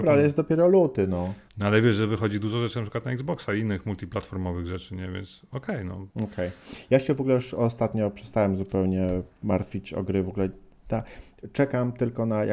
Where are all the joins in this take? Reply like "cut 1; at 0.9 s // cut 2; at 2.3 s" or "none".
cut 1; at 1.5 s // cut 2; at 6.1 s